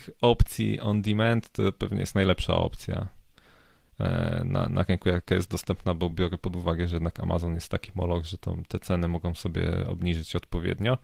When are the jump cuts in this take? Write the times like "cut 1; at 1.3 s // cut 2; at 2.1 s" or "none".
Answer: none